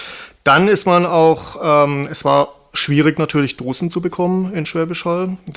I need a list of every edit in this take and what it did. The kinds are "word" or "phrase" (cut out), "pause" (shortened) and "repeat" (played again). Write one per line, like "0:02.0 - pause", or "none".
none

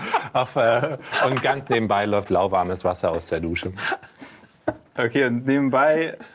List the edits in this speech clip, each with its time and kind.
none

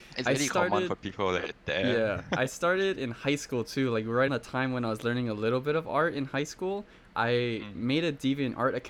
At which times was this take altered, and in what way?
0:01.5 - word
0:04.3 - word

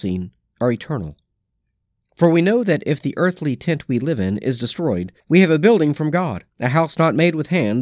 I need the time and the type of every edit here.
0:05.2 - pause
0:06.5 - pause

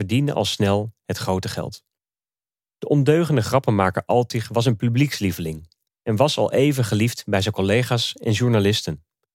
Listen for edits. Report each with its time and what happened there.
none

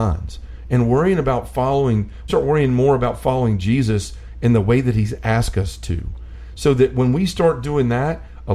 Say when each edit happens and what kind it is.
0:02.3 - phrase

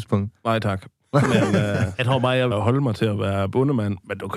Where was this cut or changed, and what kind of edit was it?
0:02.0 - word
0:02.5 - word

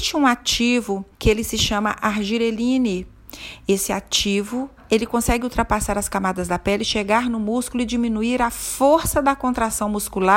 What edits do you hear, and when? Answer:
0:01.1 - pause

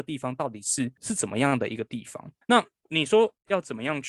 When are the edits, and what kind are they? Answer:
0:01.0 - pause
0:02.4 - pause

